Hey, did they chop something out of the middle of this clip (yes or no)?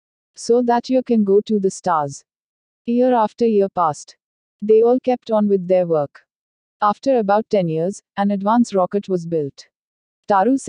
no